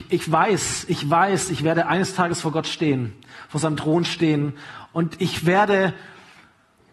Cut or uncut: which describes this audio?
uncut